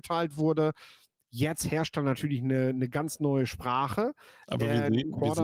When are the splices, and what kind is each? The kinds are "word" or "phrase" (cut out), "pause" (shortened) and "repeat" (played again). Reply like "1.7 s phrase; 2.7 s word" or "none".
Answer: none